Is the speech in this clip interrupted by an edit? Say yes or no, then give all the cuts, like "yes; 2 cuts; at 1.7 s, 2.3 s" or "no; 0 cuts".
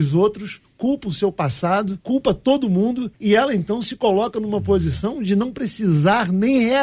yes; 2 cuts; at 2.0 s, 3.1 s